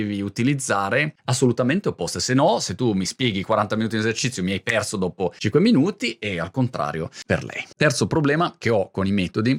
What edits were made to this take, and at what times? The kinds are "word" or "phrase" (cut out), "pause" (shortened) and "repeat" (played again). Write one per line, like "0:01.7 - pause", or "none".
0:07.7 - pause